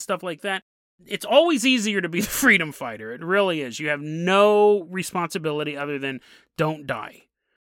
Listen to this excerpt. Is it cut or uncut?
uncut